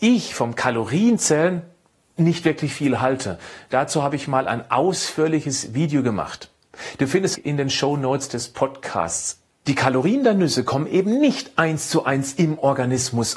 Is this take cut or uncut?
cut